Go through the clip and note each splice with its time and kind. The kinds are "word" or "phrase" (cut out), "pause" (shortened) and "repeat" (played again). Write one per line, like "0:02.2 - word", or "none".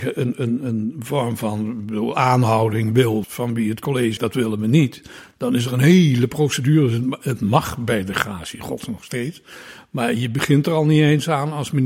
0:03.2 - phrase
0:04.2 - word